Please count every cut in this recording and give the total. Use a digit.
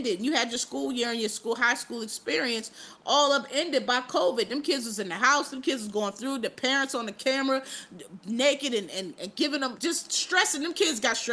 1